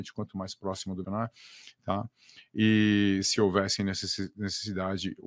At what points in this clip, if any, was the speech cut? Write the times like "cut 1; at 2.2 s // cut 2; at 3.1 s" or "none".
cut 1; at 1.0 s